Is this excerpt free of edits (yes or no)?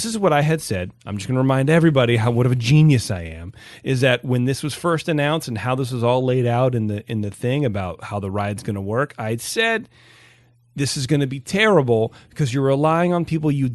yes